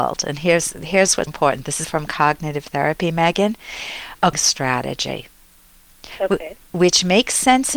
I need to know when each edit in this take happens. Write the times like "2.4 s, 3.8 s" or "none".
1.3 s, 1.8 s, 4.3 s